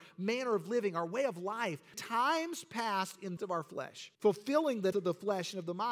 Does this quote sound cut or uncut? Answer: cut